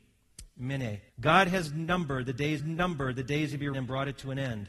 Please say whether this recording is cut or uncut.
cut